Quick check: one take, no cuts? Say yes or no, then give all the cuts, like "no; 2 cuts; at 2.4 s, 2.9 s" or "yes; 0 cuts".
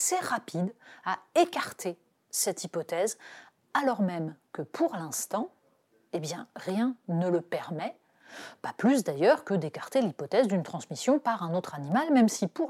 yes; 0 cuts